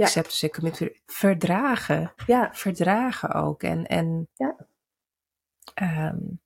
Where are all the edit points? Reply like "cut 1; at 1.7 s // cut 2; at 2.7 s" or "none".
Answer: cut 1; at 2.2 s